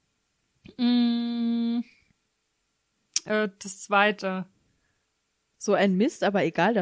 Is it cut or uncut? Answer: uncut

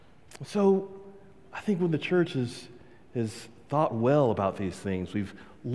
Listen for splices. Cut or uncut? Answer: uncut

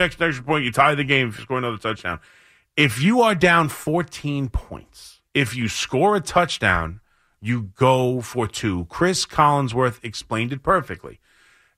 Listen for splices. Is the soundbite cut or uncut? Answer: cut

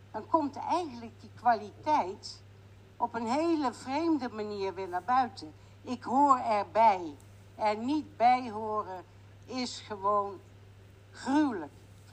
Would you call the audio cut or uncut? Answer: uncut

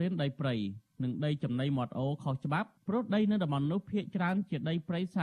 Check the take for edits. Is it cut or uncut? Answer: cut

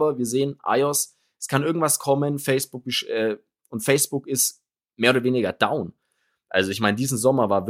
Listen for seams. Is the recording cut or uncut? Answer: uncut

